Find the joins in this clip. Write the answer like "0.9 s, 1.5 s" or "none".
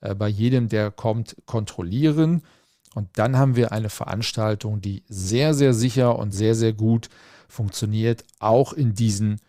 none